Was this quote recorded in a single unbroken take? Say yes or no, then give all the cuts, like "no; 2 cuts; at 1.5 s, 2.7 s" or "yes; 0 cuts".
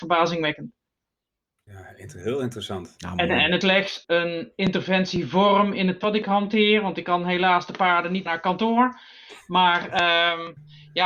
no; 4 cuts; at 3.6 s, 4.0 s, 6.0 s, 8.3 s